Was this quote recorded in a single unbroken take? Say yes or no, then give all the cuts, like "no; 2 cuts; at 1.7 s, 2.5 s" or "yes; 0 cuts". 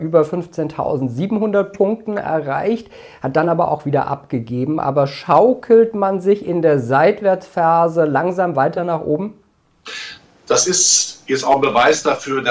yes; 0 cuts